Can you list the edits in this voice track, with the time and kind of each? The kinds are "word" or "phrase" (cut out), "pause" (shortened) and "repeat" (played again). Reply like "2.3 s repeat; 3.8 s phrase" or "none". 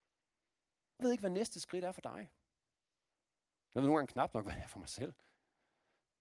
1.0 s word